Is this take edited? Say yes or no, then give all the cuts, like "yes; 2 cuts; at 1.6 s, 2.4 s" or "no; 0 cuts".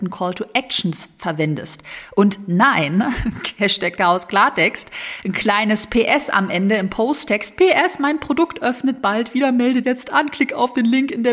yes; 1 cut; at 9.8 s